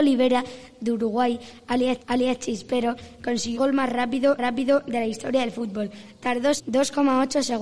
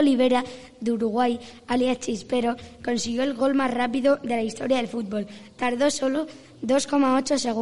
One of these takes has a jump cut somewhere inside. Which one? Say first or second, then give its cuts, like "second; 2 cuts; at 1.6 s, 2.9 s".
first; 4 cuts; at 2.0 s, 3.5 s, 4.4 s, 6.6 s